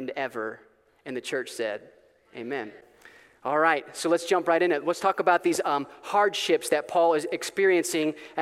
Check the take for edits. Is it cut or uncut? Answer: uncut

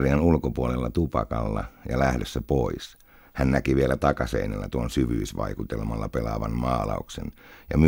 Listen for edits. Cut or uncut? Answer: uncut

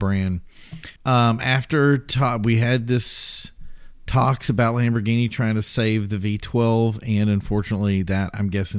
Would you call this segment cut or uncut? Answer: cut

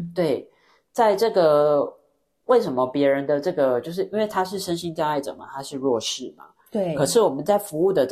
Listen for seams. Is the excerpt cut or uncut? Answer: uncut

